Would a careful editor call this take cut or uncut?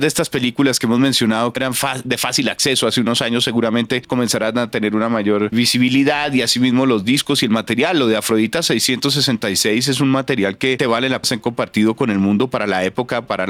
cut